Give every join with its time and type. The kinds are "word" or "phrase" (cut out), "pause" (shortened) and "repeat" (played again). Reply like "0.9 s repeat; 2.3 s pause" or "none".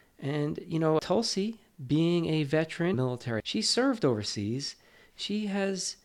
1.0 s word; 2.9 s phrase; 3.4 s word